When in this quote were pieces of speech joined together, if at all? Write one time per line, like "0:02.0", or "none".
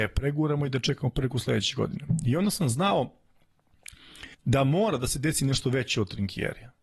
0:04.3